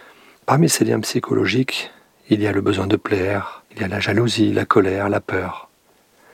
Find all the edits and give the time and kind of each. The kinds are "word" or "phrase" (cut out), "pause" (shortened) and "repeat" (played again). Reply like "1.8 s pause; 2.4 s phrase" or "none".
3.7 s pause